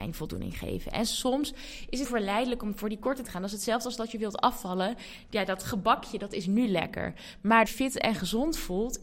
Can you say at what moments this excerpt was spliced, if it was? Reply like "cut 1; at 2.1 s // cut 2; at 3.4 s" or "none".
cut 1; at 2.0 s // cut 2; at 3.2 s // cut 3; at 7.7 s